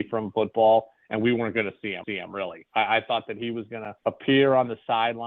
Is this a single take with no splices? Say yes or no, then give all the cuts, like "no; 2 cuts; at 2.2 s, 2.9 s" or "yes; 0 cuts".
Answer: no; 2 cuts; at 2.0 s, 4.0 s